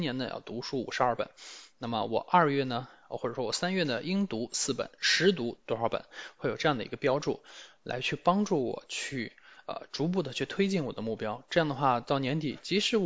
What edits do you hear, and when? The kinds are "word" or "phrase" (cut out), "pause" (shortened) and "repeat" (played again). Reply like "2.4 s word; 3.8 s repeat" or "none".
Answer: none